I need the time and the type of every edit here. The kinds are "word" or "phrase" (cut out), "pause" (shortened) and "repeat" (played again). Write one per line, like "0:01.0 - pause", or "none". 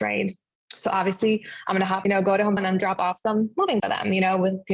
0:02.0 - phrase
0:02.6 - word
0:03.8 - word